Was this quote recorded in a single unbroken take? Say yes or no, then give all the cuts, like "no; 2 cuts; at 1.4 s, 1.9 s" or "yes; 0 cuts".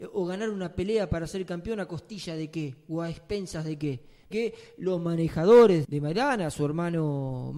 no; 2 cuts; at 4.3 s, 5.8 s